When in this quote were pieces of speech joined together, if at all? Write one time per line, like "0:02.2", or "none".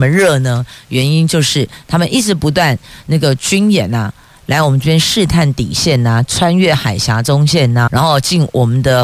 0:07.9